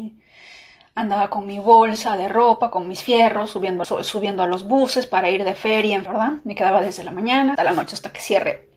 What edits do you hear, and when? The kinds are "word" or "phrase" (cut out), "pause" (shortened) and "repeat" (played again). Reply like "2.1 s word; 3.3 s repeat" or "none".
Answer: 3.8 s word; 6.1 s word; 7.6 s word